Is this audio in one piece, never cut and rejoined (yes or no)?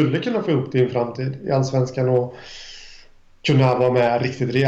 yes